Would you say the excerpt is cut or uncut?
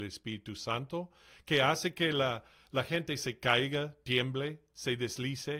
uncut